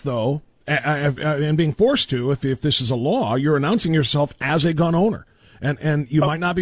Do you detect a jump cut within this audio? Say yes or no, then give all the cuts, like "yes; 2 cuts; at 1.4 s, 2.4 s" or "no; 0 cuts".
no; 0 cuts